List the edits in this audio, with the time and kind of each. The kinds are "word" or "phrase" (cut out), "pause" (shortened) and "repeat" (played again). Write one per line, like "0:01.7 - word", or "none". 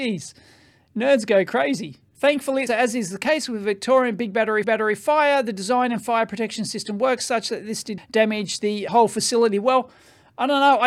0:02.7 - word
0:04.6 - repeat
0:08.0 - word
0:08.9 - word